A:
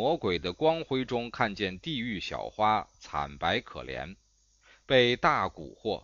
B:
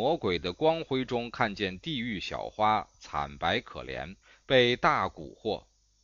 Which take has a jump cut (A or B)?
B